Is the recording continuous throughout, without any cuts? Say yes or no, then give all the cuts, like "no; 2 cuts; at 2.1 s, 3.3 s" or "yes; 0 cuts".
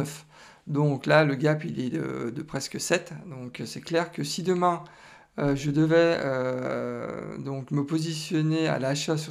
yes; 0 cuts